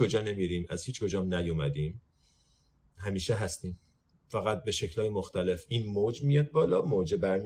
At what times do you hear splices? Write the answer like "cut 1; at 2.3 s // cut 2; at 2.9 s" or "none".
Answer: none